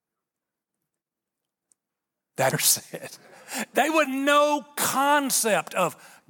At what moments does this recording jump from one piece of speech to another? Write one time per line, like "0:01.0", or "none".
0:02.5
0:03.2
0:04.0